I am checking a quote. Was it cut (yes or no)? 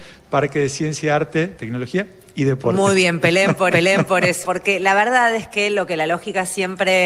yes